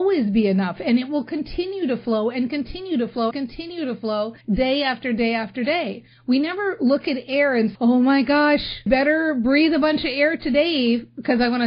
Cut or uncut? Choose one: cut